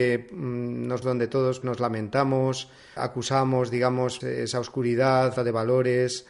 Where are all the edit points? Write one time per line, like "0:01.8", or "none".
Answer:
0:01.0
0:01.6
0:03.0
0:04.2
0:05.4